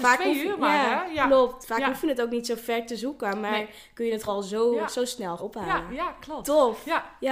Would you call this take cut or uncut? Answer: cut